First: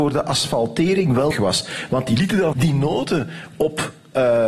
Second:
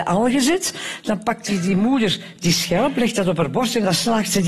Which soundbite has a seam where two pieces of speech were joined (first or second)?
first